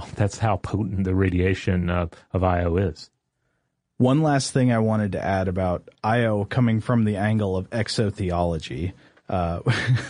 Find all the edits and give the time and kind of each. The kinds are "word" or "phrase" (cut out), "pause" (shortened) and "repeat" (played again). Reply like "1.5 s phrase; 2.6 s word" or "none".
none